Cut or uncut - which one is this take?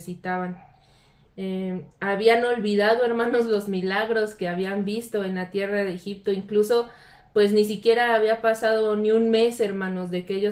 cut